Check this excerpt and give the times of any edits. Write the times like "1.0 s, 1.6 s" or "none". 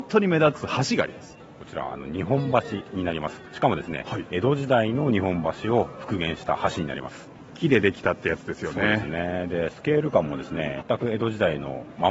10.8 s